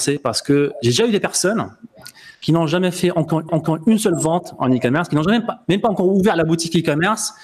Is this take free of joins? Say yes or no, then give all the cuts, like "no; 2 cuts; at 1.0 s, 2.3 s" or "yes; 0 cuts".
no; 2 cuts; at 2.3 s, 3.5 s